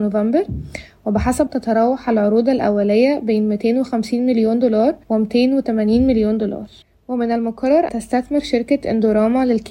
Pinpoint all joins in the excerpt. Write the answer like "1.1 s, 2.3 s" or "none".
1.5 s, 5.0 s, 6.8 s, 7.9 s